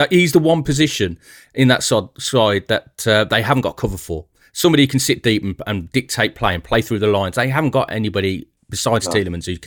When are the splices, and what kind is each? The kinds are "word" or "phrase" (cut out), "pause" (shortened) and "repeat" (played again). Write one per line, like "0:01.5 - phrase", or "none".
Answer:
none